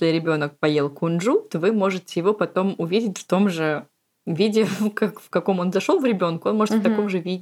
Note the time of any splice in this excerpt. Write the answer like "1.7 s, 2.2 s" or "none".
none